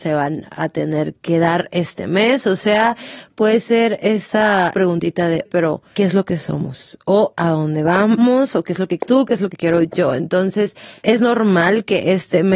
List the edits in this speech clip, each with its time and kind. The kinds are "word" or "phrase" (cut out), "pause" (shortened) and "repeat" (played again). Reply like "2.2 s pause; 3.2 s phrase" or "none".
5.5 s word; 9.0 s word